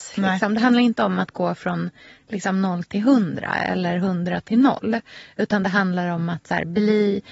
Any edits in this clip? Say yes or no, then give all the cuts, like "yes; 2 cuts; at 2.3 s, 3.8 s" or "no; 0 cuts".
no; 0 cuts